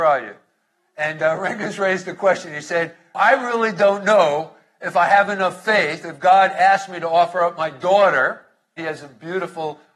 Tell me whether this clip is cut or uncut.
uncut